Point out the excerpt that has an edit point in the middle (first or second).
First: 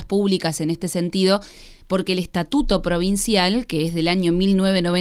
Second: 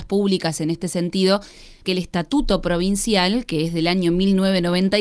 second